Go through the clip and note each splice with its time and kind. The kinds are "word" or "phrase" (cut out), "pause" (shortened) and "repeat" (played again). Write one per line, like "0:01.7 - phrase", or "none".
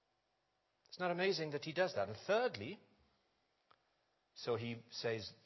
none

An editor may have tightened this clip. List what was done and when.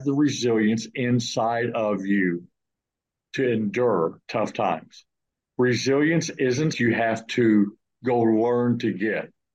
0:04.2 - pause
0:06.7 - phrase

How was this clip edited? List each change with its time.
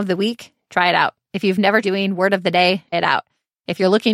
0:01.8 - word
0:02.9 - word

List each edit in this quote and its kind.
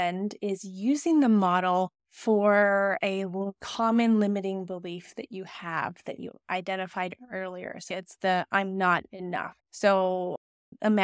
0:02.0 - pause
0:07.9 - word
0:09.6 - pause

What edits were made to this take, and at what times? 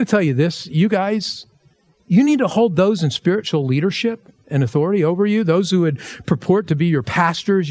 none

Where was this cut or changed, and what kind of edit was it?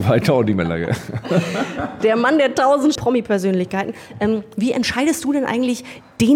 0:02.0 - word
0:03.0 - phrase

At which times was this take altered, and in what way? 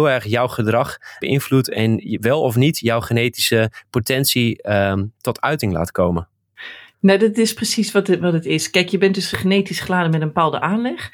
0:01.2 - word
0:09.3 - word

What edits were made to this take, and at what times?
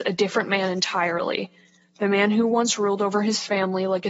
none

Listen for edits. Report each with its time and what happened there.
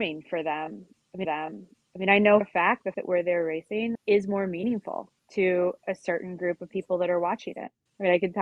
0:01.2 - repeat
0:02.4 - word
0:02.9 - word
0:03.9 - word
0:05.2 - pause

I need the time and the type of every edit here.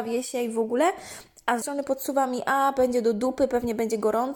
0:01.6 - word

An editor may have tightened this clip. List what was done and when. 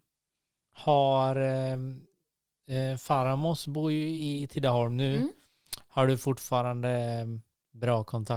none

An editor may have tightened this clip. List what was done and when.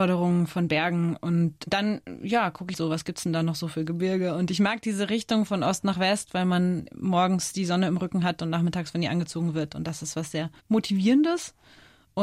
0:02.7 - word

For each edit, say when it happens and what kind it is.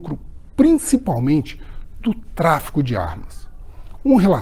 none

